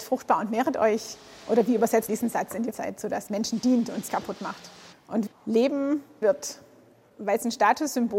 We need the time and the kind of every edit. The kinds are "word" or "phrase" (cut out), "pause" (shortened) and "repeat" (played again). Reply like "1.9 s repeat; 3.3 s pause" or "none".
2.1 s word; 2.7 s word; 3.3 s word; 4.1 s word; 5.3 s word; 6.2 s word